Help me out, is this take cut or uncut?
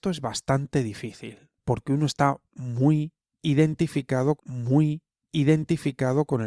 cut